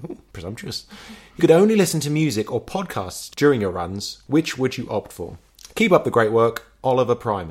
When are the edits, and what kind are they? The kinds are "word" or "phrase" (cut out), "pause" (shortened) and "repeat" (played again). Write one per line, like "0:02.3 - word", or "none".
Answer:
0:01.4 - word